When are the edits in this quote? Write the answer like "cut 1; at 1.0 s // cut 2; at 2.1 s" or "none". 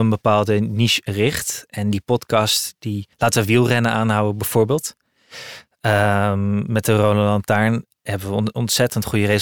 cut 1; at 3.1 s